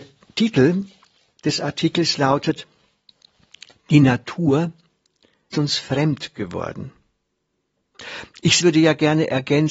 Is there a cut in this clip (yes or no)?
yes